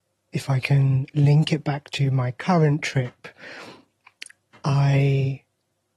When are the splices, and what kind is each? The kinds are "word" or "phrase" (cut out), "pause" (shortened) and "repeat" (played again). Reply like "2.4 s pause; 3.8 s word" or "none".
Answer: none